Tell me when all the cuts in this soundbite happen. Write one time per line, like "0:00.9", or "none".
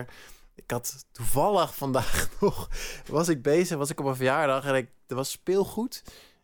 none